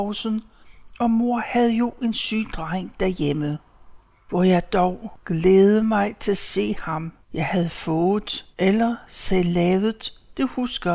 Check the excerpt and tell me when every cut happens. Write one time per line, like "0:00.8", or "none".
0:04.2
0:07.2
0:08.5